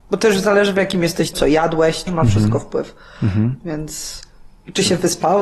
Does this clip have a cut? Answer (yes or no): yes